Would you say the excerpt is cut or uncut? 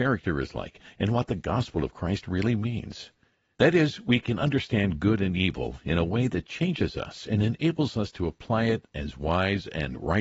uncut